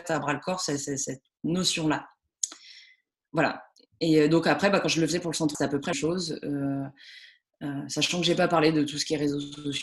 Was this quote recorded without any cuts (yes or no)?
no